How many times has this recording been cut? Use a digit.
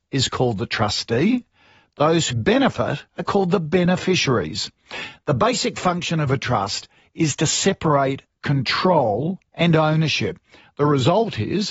3